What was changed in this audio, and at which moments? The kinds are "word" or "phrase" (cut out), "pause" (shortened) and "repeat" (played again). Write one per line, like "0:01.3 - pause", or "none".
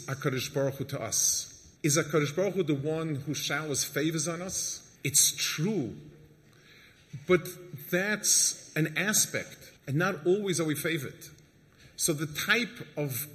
0:01.8 - pause
0:05.0 - pause
0:09.8 - pause